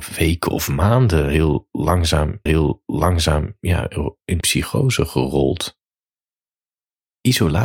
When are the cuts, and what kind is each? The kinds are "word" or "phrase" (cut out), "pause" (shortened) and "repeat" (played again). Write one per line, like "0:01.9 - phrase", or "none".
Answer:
0:02.5 - repeat
0:04.4 - word